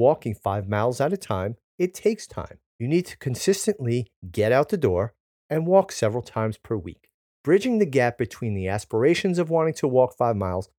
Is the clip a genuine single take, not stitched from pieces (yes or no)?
no